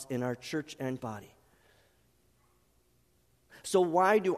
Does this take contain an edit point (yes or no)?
yes